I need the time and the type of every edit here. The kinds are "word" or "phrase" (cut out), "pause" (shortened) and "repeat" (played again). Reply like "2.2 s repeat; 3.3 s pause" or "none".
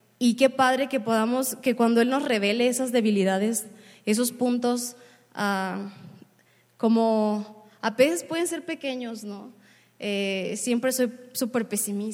none